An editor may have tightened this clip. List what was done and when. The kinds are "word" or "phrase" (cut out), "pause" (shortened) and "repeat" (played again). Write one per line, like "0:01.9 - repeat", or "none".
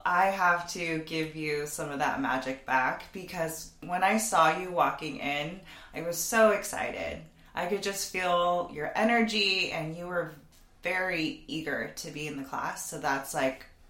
none